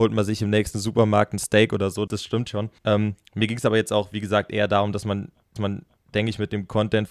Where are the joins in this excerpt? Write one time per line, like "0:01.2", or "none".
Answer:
0:02.1
0:02.8
0:05.6